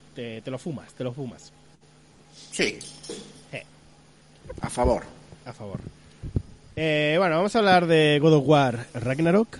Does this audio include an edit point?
no; 0 cuts

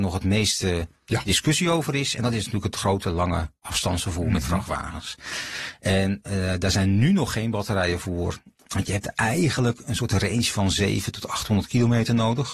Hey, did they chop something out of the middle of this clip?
no; 0 cuts

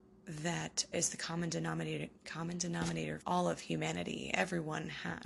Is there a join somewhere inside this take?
yes; 3 cuts; at 0.9 s, 2.2 s, 3.2 s

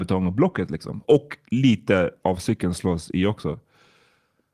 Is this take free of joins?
yes; 0 cuts

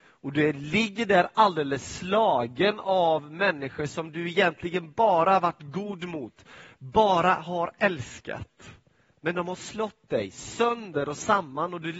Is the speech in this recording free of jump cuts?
yes; 0 cuts

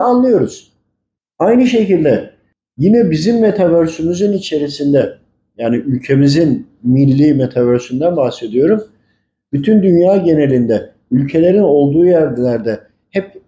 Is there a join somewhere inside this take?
no; 0 cuts

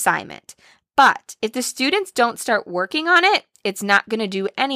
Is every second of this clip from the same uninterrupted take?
yes; 0 cuts

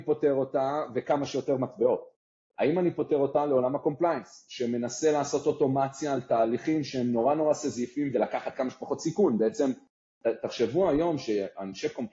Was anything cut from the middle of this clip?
no; 0 cuts

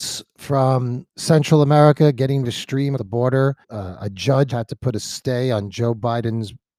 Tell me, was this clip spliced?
yes; 5 cuts; at 1.1 s, 2.4 s, 3.0 s, 3.6 s, 4.5 s

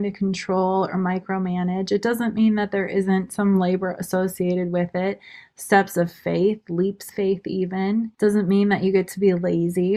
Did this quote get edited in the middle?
yes; 2 cuts; at 7.1 s, 8.1 s

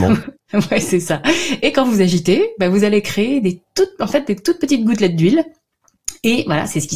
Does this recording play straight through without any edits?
no; 1 cut; at 3.7 s

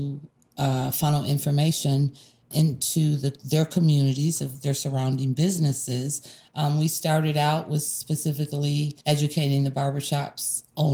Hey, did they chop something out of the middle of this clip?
yes; 2 cuts; at 2.5 s, 9.0 s

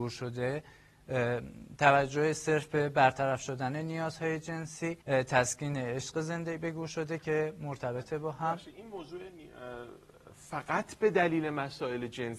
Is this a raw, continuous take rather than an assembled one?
no; 1 cut; at 5.0 s

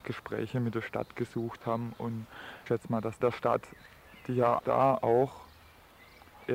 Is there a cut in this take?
yes; 3 cuts; at 2.7 s, 3.2 s, 4.6 s

